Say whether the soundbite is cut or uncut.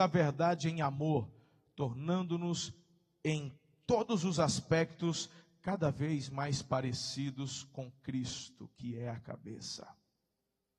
uncut